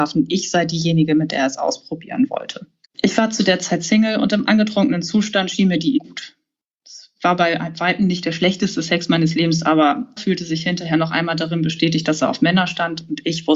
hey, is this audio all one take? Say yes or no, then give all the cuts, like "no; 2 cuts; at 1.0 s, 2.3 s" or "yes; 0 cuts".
no; 3 cuts; at 2.9 s, 6.0 s, 10.2 s